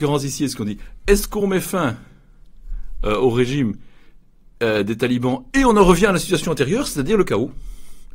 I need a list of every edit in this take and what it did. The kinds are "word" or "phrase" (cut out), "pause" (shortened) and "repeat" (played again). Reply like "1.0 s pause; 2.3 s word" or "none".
none